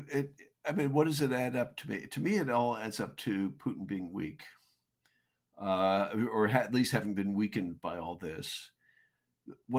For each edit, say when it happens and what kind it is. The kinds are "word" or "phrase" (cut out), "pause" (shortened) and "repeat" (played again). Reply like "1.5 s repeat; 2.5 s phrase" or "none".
none